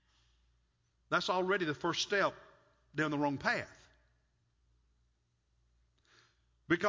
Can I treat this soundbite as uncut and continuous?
yes; 0 cuts

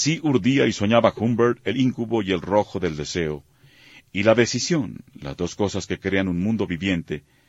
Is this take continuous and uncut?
yes; 0 cuts

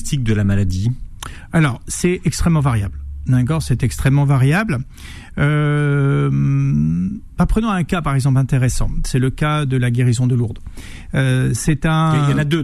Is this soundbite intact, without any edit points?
yes; 0 cuts

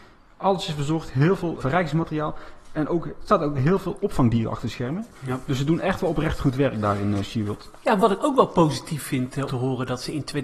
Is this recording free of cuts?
no; 3 cuts; at 1.6 s, 5.1 s, 9.5 s

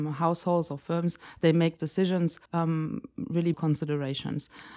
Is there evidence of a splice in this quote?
yes; 3 cuts; at 1.8 s, 2.5 s, 3.5 s

